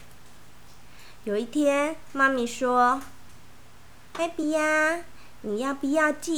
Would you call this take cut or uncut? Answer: uncut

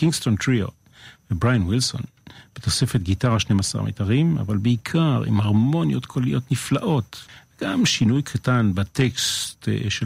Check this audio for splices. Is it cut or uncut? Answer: uncut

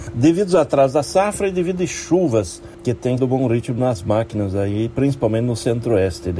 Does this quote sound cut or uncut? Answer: cut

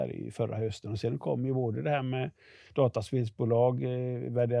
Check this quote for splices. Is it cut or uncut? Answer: uncut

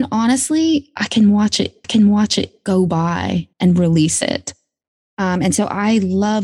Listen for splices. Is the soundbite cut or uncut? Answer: cut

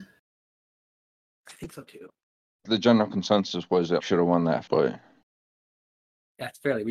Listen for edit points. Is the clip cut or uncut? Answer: cut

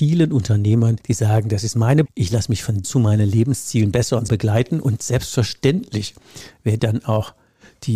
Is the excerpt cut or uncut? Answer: cut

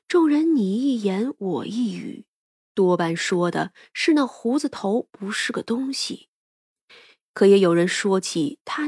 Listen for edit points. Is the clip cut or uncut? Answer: uncut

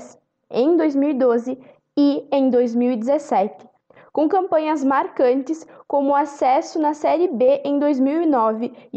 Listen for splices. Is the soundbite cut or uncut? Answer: uncut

